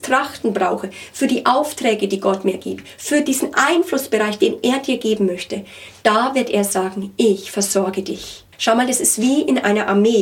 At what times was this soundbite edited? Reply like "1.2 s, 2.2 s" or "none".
8.5 s

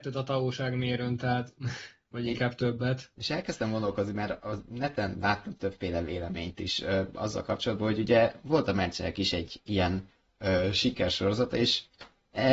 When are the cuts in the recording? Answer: none

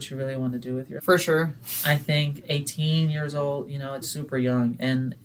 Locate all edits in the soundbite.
1.0 s, 4.0 s

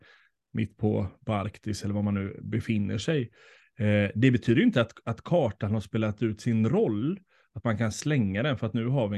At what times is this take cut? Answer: none

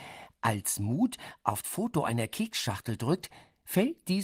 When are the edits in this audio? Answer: 1.6 s

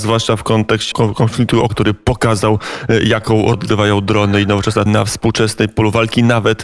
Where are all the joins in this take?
0.9 s, 1.7 s, 3.5 s, 4.9 s

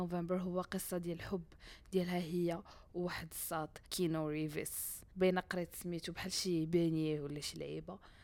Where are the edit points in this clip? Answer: 3.8 s, 5.1 s

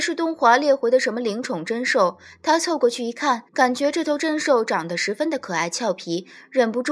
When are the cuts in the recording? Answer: 3.5 s

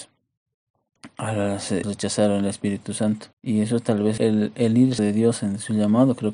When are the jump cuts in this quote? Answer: 1.8 s, 3.3 s, 4.2 s, 5.0 s

